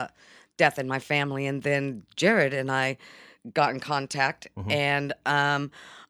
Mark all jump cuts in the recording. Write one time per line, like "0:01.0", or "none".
none